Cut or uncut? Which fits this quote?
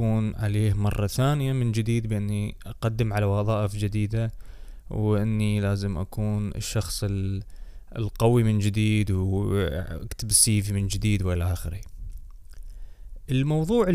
uncut